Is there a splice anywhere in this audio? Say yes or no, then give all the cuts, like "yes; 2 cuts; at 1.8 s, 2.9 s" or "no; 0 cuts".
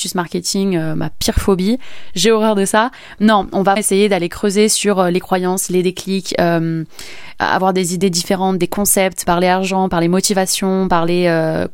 yes; 2 cuts; at 3.8 s, 9.2 s